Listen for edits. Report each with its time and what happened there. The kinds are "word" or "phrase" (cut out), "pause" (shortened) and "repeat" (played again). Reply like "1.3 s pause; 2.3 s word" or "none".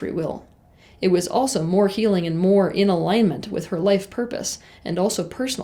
none